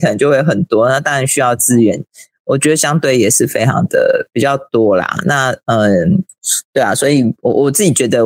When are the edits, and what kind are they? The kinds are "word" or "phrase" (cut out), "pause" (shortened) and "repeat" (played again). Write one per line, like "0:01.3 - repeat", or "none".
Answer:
none